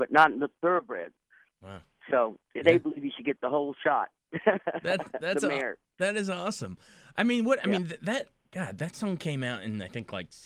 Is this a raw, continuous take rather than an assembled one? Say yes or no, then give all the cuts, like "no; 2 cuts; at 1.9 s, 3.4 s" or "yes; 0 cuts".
yes; 0 cuts